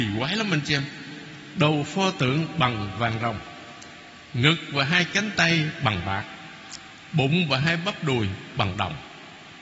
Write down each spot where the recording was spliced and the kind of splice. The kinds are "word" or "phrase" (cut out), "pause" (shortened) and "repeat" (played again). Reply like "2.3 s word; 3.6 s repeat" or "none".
none